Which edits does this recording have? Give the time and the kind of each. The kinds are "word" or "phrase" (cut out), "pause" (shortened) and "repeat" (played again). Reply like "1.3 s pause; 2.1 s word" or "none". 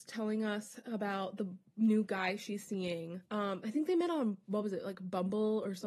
3.3 s pause